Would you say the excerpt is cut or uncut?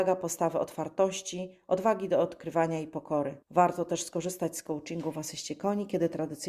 cut